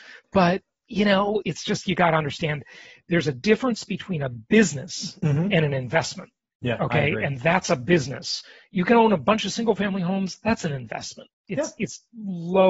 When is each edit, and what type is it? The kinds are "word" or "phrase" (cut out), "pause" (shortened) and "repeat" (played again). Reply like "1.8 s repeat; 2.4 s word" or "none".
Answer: 1.4 s word